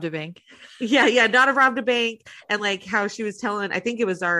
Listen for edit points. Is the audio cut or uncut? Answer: uncut